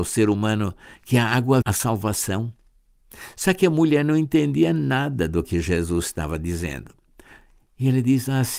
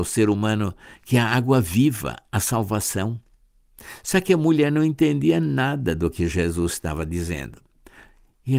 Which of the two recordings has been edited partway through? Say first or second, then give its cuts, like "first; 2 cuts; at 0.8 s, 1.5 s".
first; 1 cut; at 1.6 s